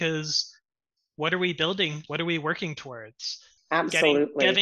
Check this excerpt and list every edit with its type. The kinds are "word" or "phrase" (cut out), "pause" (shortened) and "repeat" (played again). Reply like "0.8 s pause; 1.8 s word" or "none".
2.1 s word; 3.6 s word